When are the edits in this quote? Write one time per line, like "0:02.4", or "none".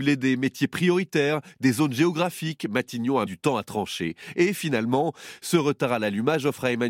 0:03.3

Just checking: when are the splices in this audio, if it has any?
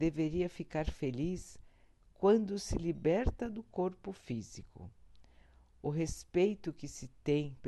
none

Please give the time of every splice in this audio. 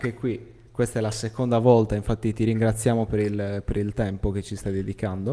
none

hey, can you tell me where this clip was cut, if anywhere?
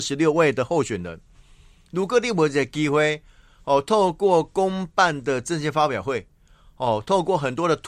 none

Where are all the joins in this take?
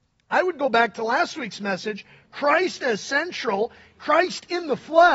none

